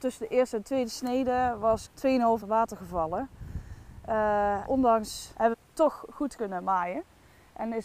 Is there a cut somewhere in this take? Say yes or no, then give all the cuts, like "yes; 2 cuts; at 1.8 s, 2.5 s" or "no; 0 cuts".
yes; 5 cuts; at 1.9 s, 2.4 s, 4.7 s, 5.5 s, 6.4 s